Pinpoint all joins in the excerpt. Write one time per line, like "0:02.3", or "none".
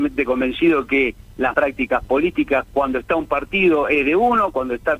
0:01.5